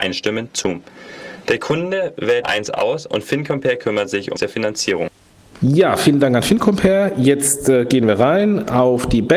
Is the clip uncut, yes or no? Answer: no